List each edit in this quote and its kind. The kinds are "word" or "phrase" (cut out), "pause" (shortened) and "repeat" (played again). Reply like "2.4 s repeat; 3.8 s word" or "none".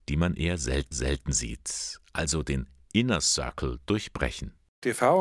0.9 s repeat